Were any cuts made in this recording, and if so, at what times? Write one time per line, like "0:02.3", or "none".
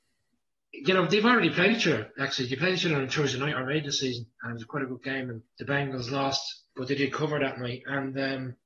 0:05.5
0:06.7